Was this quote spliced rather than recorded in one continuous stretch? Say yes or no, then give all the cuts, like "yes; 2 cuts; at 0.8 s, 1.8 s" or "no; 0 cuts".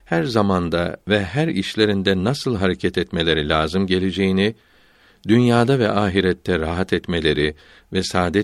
no; 0 cuts